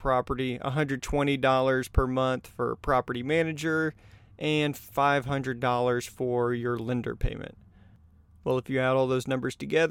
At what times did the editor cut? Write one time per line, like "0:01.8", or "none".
none